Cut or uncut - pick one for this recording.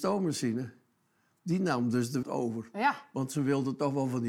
cut